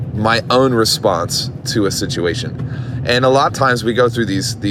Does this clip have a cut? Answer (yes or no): yes